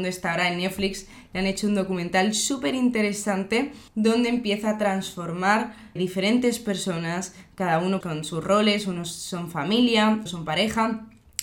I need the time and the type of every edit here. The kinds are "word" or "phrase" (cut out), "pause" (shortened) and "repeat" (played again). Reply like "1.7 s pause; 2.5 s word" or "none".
3.9 s pause; 6.0 s word; 8.0 s word; 10.3 s word